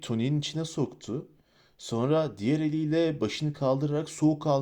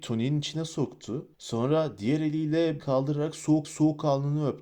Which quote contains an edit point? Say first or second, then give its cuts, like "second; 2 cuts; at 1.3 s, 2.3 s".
second; 3 cuts; at 1.3 s, 2.8 s, 3.6 s